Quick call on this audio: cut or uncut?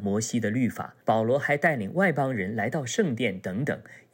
cut